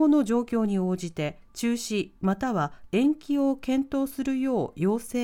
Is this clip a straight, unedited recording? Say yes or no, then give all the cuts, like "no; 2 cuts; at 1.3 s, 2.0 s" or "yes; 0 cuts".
no; 1 cut; at 1.5 s